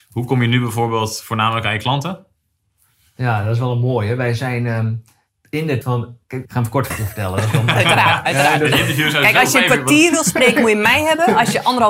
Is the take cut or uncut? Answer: cut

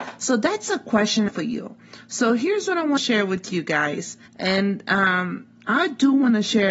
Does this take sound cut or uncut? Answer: cut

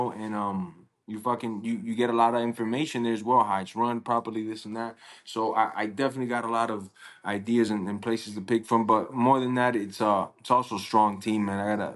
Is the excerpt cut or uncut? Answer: uncut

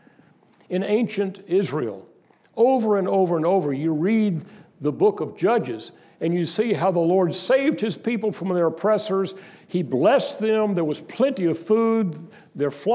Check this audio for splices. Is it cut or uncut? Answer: uncut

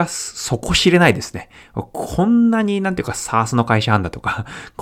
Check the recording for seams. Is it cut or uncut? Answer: uncut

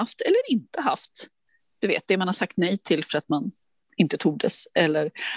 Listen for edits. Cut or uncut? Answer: uncut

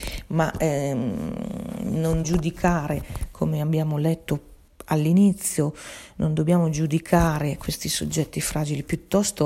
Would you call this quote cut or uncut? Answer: cut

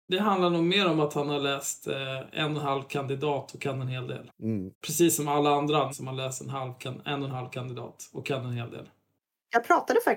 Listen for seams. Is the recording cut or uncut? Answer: cut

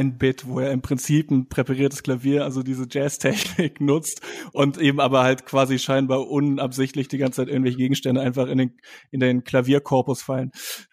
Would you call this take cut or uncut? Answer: uncut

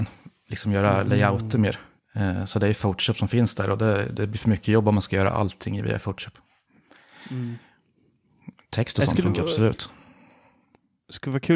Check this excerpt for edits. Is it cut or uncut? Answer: uncut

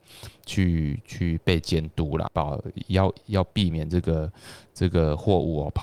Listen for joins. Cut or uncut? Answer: cut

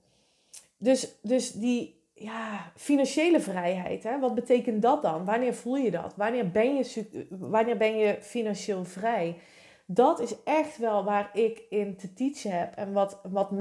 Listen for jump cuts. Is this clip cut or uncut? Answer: uncut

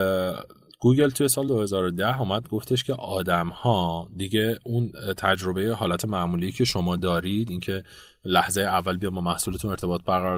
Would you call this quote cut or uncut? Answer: uncut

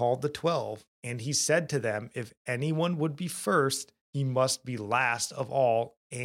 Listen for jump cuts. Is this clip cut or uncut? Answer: cut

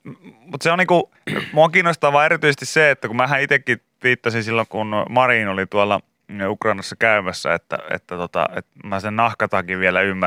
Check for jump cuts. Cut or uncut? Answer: cut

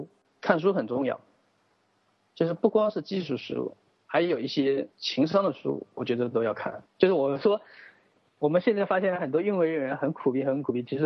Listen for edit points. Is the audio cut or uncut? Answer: cut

